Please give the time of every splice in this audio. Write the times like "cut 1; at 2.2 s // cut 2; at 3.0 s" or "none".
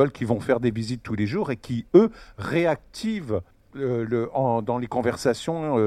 cut 1; at 3.5 s